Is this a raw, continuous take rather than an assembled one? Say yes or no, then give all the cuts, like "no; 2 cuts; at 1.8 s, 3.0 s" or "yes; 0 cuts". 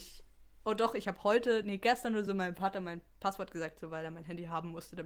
yes; 0 cuts